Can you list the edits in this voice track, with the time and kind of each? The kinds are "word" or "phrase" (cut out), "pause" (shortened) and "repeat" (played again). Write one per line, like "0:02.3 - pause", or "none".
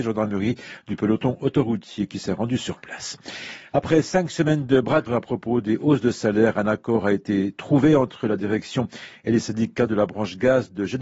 0:05.1 - word